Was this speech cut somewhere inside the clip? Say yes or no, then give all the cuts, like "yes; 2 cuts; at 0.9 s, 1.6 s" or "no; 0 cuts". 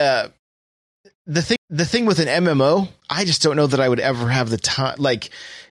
yes; 1 cut; at 1.6 s